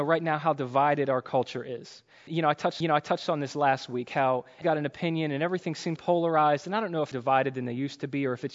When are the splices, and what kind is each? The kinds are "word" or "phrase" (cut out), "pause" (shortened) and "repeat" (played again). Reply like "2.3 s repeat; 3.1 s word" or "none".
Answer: 2.3 s word; 2.8 s repeat; 4.6 s word; 6.0 s word; 7.1 s phrase